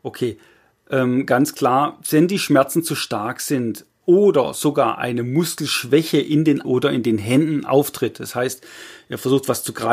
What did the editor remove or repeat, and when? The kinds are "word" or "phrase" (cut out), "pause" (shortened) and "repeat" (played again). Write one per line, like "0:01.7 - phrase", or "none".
0:06.6 - word